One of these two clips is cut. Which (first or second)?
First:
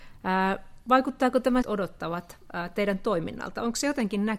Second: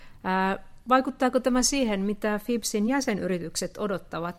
first